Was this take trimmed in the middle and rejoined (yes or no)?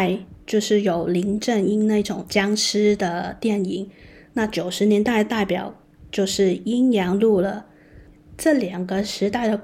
no